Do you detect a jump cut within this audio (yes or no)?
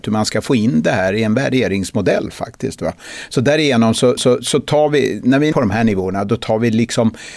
yes